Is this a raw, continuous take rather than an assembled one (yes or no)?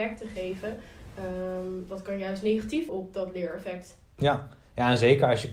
no